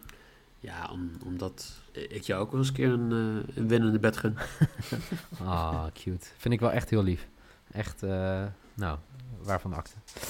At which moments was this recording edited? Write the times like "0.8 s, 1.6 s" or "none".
1.9 s